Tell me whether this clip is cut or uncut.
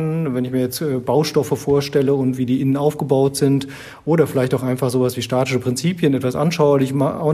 uncut